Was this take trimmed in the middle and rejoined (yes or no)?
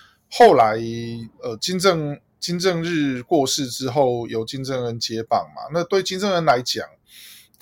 yes